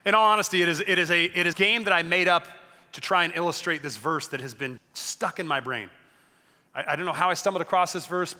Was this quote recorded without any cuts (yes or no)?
no